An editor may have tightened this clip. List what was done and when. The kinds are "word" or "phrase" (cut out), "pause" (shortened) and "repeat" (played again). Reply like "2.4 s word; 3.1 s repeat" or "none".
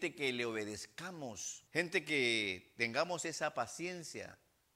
1.7 s pause